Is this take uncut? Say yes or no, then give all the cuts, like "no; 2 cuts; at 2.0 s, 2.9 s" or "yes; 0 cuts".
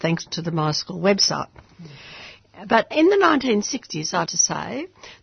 no; 2 cuts; at 2.9 s, 4.3 s